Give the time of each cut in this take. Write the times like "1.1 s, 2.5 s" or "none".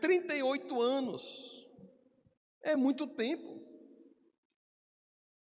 none